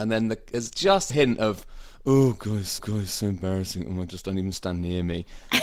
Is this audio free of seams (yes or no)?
no